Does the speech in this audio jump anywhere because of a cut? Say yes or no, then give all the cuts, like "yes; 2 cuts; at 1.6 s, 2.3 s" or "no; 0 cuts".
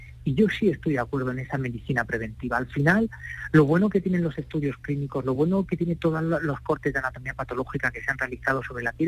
no; 0 cuts